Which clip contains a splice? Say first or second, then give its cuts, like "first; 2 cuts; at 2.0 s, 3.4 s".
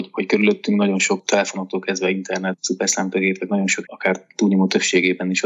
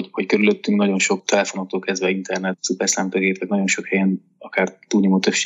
first; 1 cut; at 3.8 s